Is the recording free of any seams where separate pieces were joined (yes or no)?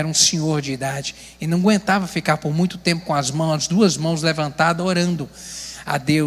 yes